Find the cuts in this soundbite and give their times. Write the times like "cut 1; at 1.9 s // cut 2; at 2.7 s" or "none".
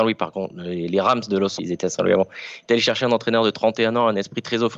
cut 1; at 1.6 s